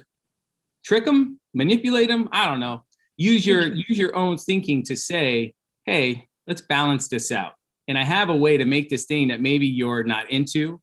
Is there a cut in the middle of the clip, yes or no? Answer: no